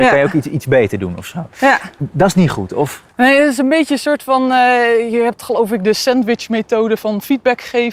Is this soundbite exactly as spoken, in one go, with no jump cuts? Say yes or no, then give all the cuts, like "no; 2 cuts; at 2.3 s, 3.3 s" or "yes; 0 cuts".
yes; 0 cuts